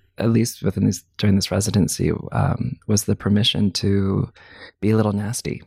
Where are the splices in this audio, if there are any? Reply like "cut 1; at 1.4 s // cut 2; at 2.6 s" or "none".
none